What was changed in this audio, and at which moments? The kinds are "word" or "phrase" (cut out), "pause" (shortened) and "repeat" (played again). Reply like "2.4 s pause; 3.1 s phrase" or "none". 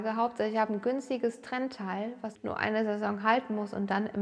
2.3 s word